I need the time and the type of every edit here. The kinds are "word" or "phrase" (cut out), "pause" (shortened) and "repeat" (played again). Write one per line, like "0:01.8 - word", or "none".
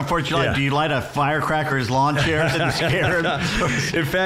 0:01.7 - word
0:02.5 - word

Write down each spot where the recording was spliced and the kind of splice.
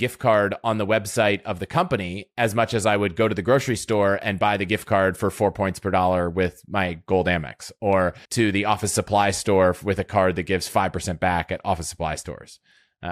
0:08.2 - pause

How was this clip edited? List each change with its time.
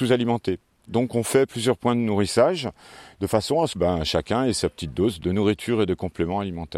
0:03.7 - word
0:05.2 - word

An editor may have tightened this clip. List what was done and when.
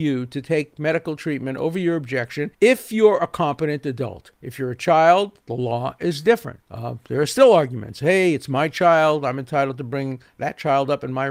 0:02.5 - pause
0:04.4 - pause
0:05.4 - pause
0:06.6 - pause

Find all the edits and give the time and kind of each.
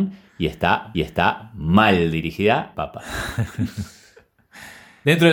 0:00.9 - repeat
0:02.7 - word

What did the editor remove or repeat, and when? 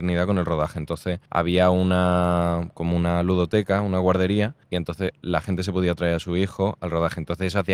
0:01.3 - pause
0:04.6 - pause

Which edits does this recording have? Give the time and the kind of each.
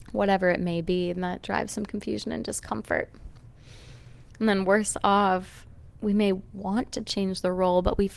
0:05.9 - pause

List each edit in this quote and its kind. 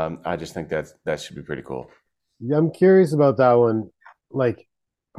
none

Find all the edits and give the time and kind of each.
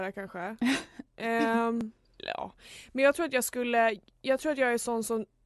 none

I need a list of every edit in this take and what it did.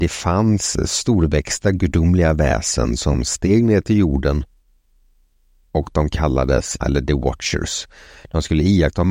0:06.8 - word

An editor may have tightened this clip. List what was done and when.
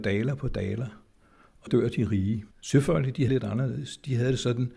0:01.7 - word
0:02.5 - pause
0:03.3 - word

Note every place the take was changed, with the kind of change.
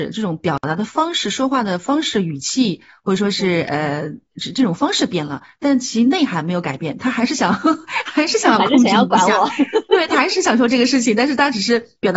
none

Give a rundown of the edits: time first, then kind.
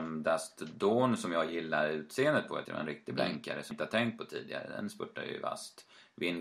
0:02.6 - word
0:03.7 - word

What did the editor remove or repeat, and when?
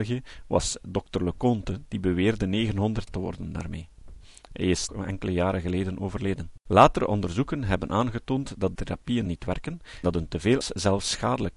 0:03.1 - word
0:04.9 - word
0:06.6 - pause
0:08.8 - word
0:09.3 - word
0:10.0 - word
0:10.6 - phrase

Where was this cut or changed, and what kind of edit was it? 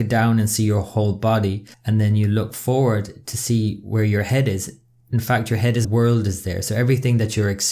0:01.7 - pause
0:05.8 - phrase

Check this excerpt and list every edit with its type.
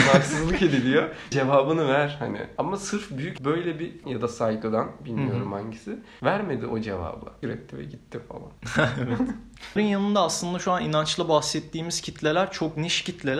0:01.3 - word
0:03.4 - word
0:04.0 - word
0:07.4 - word
0:09.8 - word

